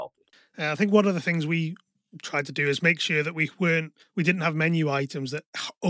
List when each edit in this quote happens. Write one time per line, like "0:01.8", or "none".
0:04.0